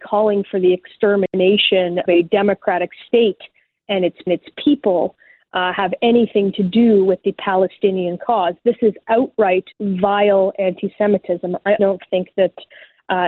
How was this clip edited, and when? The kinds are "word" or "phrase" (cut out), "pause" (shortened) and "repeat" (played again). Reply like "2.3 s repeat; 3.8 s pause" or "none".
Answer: 2.1 s word; 4.3 s repeat; 9.7 s pause; 11.8 s word